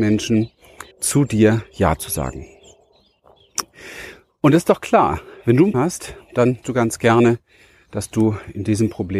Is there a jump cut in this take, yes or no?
yes